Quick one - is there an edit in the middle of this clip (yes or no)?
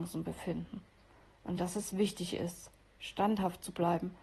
no